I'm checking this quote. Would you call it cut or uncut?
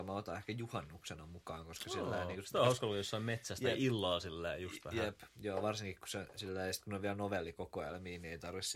uncut